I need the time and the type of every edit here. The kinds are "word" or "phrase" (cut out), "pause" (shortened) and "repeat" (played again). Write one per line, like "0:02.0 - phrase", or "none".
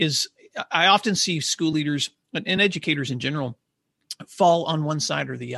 none